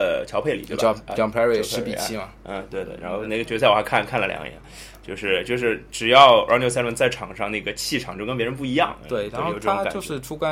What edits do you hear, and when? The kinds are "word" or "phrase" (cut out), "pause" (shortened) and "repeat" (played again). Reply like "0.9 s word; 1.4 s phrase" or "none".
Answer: none